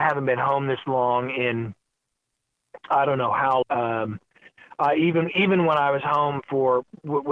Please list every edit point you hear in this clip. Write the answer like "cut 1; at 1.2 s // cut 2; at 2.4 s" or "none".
cut 1; at 3.6 s